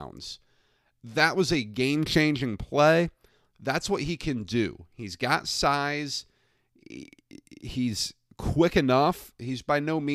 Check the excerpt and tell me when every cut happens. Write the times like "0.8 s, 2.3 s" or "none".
none